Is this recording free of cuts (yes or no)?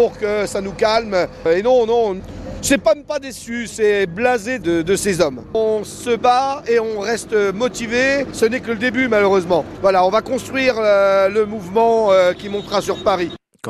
no